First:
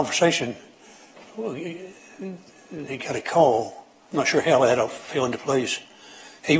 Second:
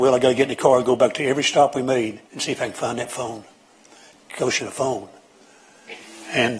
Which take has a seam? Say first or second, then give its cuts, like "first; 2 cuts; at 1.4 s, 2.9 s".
second; 2 cuts; at 2.3 s, 4.6 s